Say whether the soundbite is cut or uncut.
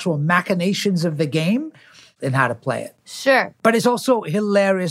uncut